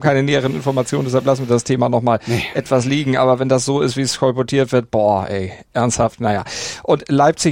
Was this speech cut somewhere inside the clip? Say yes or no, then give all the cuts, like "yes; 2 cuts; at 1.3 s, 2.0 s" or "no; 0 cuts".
yes; 1 cut; at 5.7 s